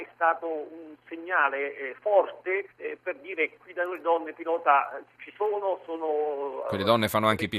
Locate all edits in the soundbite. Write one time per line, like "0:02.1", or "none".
0:02.7